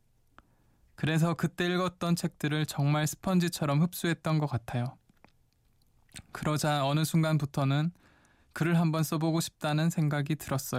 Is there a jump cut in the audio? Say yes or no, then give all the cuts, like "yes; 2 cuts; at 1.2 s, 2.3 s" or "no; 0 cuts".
no; 0 cuts